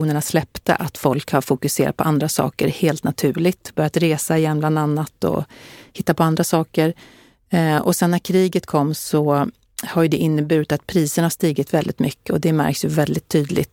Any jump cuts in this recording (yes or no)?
no